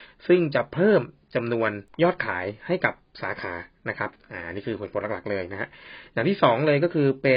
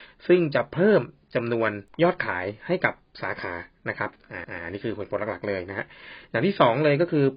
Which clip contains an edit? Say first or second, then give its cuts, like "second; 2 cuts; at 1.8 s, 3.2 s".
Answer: second; 1 cut; at 4.4 s